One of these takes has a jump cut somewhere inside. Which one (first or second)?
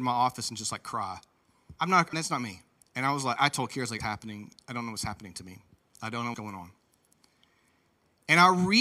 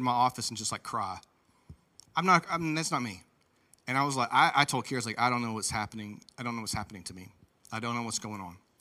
first